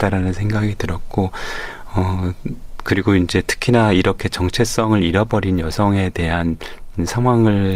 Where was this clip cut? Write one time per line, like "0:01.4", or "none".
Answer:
none